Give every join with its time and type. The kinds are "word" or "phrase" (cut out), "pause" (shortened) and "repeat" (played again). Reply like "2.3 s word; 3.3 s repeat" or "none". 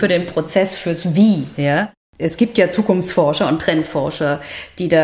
none